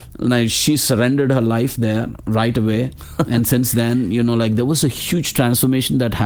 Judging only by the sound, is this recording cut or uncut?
uncut